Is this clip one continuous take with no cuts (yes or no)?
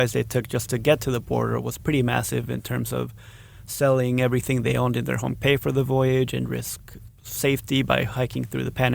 no